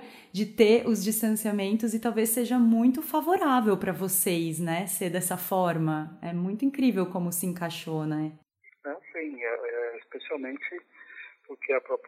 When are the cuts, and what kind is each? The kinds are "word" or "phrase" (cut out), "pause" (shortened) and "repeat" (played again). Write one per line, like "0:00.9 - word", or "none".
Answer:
none